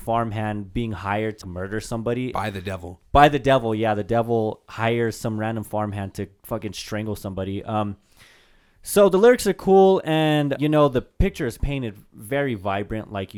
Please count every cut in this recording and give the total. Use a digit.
3